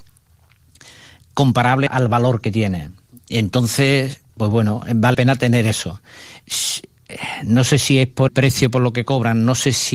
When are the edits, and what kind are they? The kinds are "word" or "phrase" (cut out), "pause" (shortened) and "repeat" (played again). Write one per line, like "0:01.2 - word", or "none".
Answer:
0:01.9 - word
0:04.3 - pause
0:05.1 - word
0:06.4 - pause
0:08.3 - word